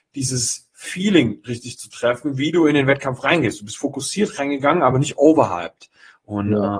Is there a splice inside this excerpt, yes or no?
no